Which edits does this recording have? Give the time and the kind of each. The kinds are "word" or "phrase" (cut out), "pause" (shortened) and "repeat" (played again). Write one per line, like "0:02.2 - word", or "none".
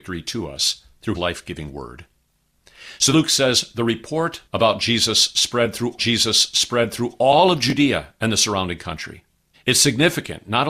0:01.1 - word
0:03.1 - word
0:04.5 - pause
0:06.0 - repeat
0:09.5 - pause